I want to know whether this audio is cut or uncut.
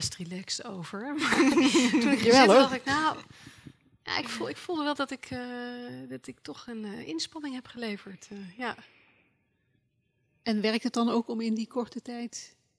uncut